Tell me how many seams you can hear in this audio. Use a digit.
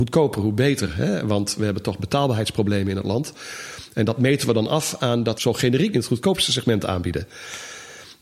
2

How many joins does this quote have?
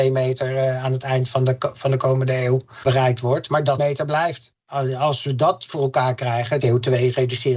2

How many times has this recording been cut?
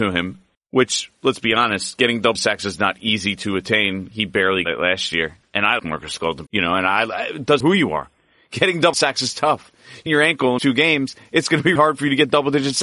9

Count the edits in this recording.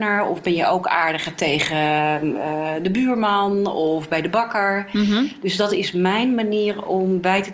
0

